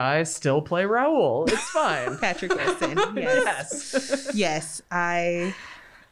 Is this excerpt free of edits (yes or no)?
yes